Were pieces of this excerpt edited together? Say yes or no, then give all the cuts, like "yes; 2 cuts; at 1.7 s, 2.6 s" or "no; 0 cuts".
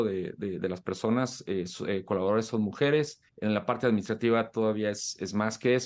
yes; 1 cut; at 3.3 s